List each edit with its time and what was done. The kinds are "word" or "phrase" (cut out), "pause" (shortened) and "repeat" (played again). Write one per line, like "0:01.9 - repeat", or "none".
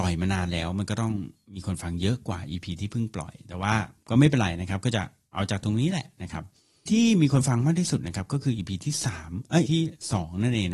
0:06.9 - word
0:09.7 - word